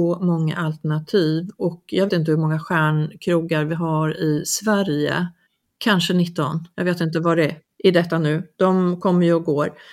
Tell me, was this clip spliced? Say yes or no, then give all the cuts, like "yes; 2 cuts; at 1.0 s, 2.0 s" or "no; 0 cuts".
yes; 3 cuts; at 2.1 s, 5.5 s, 6.7 s